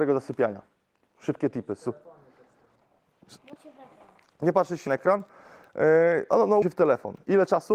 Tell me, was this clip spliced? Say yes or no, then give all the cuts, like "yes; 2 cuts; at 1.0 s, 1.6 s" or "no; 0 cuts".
yes; 3 cuts; at 3.6 s, 4.9 s, 6.6 s